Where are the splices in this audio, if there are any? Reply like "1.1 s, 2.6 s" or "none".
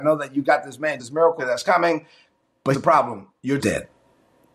1.0 s, 1.4 s, 2.7 s, 3.6 s